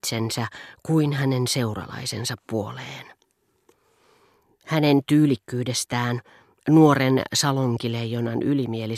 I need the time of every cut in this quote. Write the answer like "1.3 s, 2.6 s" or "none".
none